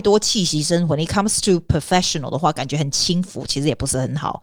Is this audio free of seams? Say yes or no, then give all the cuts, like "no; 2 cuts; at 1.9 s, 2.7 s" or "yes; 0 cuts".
yes; 0 cuts